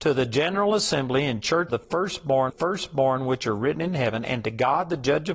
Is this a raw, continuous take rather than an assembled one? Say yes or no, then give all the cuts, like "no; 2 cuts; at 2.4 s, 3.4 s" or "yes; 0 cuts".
no; 2 cuts; at 1.7 s, 2.5 s